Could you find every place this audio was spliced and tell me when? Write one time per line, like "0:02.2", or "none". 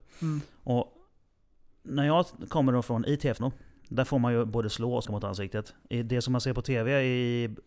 0:03.4
0:05.0

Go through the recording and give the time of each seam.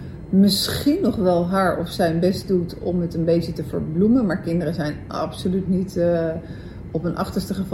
none

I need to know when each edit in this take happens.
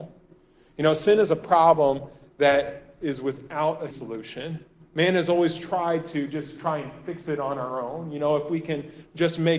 0:03.9

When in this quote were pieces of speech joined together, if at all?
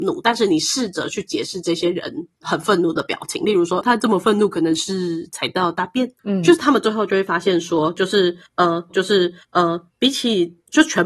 0:03.8
0:06.2
0:08.9

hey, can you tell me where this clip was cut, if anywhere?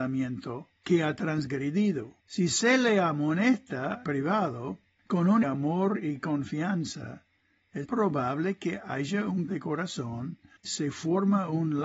0:02.2
0:04.0
0:05.4
0:07.8
0:09.5
0:10.6

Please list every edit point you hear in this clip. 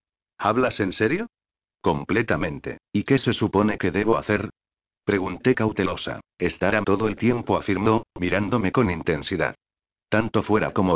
0:02.8
0:06.2
0:06.8

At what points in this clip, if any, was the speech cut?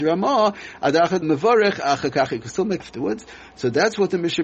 0:01.2
0:02.8

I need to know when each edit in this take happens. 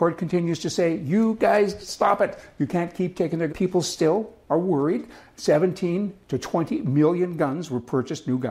0:03.5

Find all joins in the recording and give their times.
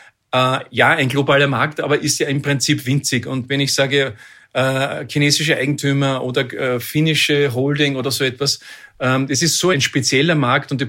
none

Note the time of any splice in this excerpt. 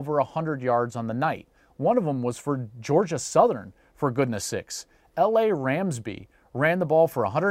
none

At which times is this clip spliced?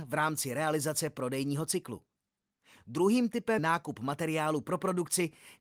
0:03.6

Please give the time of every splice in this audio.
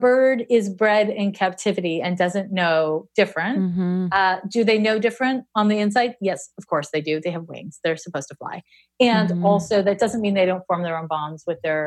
none

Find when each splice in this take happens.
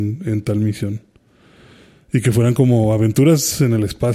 none

